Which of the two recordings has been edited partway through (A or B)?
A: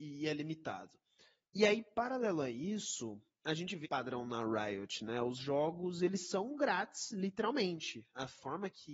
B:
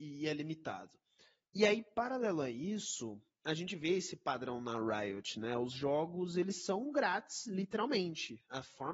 A